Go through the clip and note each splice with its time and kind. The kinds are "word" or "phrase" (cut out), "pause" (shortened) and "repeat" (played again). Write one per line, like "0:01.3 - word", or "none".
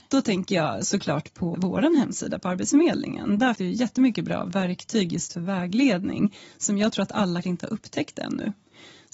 0:01.5 - word
0:03.6 - word
0:07.4 - word